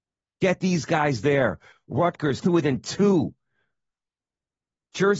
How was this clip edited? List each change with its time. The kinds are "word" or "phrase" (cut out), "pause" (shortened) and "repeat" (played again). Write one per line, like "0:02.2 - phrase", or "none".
0:02.4 - word